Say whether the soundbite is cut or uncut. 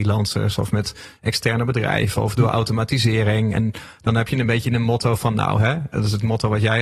uncut